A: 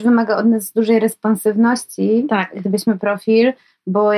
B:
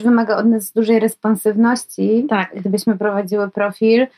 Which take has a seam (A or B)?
A